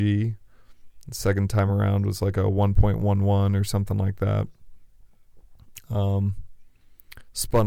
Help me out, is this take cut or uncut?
uncut